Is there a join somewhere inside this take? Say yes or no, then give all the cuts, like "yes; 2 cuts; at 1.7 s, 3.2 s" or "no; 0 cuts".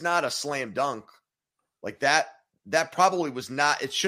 no; 0 cuts